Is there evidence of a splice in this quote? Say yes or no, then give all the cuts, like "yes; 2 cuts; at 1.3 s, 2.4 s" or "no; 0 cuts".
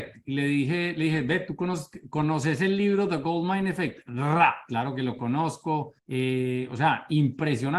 yes; 1 cut; at 6.0 s